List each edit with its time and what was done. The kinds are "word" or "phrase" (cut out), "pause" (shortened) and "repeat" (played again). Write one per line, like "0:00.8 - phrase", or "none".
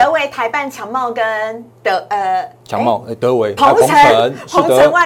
0:01.7 - pause
0:02.6 - pause
0:03.6 - phrase